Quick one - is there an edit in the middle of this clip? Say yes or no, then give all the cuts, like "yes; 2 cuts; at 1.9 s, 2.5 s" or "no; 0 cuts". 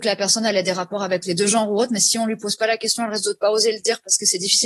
no; 0 cuts